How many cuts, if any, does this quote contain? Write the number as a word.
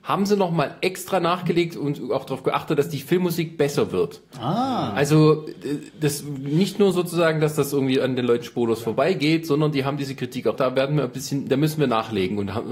one